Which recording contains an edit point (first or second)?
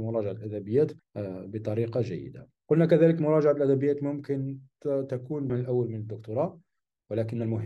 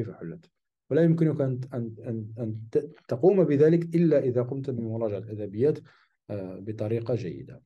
first